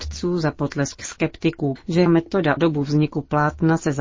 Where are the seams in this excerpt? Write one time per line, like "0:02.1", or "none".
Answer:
0:01.0
0:01.8
0:02.1
0:02.6